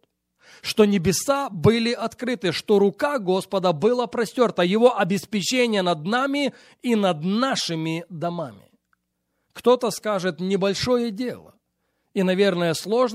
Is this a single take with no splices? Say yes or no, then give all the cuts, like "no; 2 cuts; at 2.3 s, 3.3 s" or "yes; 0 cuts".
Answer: yes; 0 cuts